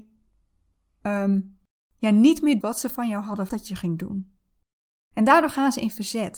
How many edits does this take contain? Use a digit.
2